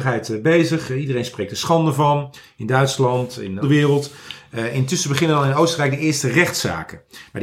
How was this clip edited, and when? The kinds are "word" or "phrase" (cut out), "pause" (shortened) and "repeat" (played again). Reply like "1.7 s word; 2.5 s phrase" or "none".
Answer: 3.6 s phrase